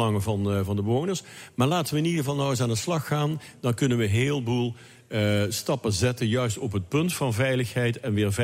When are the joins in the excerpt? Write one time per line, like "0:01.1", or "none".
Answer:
none

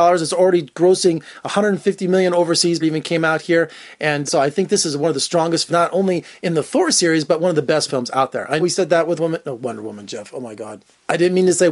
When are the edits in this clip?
0:02.8
0:04.3
0:05.7
0:07.9
0:08.6
0:09.2

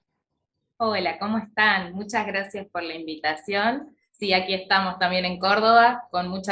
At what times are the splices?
none

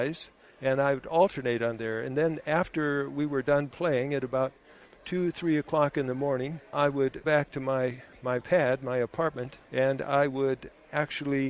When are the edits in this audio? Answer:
0:06.7
0:07.2
0:09.6

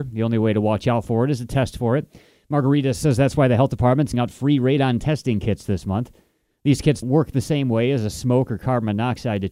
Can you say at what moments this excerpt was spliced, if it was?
0:04.1
0:07.0

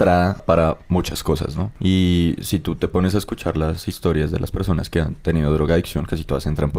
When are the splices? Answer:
none

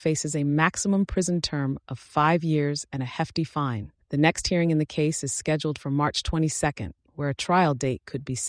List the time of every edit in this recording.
0:04.0

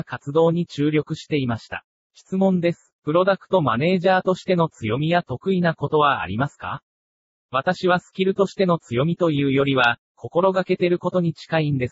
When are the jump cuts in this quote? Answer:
0:01.9

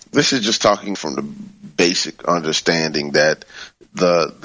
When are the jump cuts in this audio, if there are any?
0:00.9

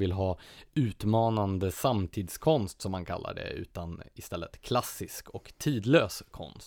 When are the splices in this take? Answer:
none

